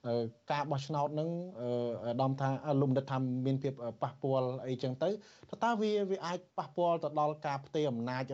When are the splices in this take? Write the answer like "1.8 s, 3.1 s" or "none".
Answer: 6.5 s